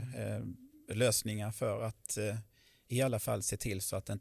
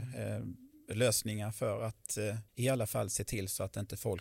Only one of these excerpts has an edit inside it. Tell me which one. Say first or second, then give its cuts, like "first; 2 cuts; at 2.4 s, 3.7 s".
second; 1 cut; at 2.5 s